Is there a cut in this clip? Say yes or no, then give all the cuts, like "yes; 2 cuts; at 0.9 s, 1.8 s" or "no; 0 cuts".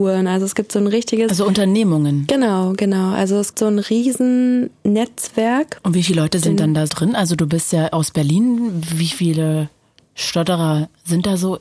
yes; 2 cuts; at 3.5 s, 6.9 s